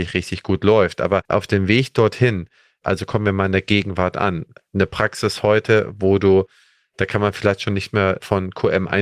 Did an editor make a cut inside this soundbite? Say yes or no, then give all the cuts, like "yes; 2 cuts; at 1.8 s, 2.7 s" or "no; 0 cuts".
yes; 1 cut; at 1.2 s